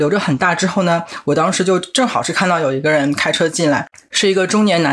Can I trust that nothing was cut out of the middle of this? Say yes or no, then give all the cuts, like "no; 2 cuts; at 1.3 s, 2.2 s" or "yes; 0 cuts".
yes; 0 cuts